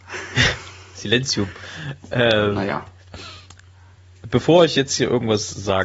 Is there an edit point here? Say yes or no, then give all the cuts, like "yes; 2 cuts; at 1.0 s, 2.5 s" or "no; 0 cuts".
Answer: no; 0 cuts